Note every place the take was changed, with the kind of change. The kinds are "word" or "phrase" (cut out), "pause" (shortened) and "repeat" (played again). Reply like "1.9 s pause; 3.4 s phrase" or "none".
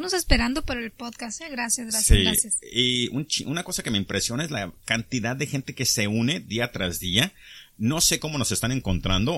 none